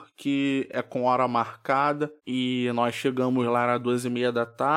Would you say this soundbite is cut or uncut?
cut